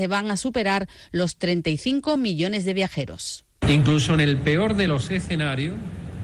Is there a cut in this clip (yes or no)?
no